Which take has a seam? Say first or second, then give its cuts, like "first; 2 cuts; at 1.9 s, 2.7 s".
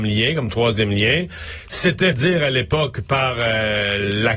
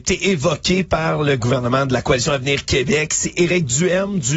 first; 1 cut; at 2.1 s